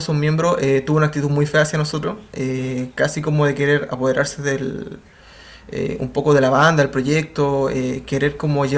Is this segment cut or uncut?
uncut